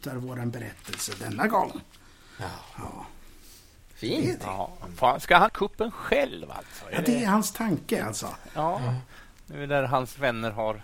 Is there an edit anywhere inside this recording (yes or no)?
yes